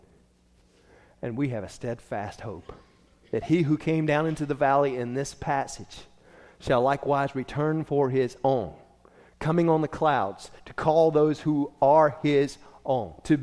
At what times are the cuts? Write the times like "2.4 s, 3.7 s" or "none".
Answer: none